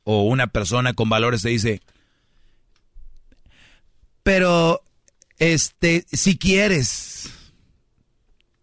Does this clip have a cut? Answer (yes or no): no